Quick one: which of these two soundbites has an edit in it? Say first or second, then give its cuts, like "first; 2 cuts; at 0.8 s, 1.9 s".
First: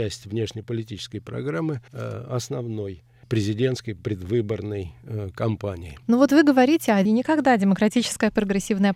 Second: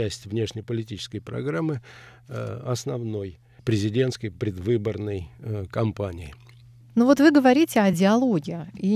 first; 3 cuts; at 1.9 s, 6.0 s, 7.0 s